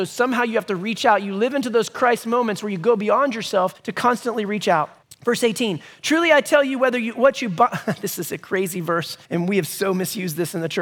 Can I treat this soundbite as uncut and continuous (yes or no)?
no